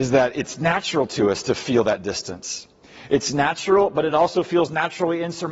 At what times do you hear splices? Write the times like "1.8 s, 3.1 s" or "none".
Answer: none